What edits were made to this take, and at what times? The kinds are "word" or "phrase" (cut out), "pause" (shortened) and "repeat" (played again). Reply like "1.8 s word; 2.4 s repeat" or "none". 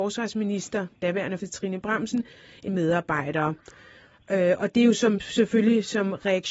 1.4 s word; 2.7 s word